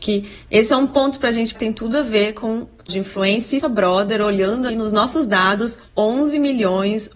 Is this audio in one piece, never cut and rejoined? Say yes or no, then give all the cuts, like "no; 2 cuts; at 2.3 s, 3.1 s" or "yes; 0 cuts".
no; 4 cuts; at 1.5 s, 2.9 s, 3.6 s, 4.7 s